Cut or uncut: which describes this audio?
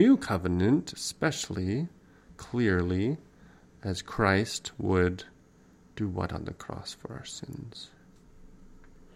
uncut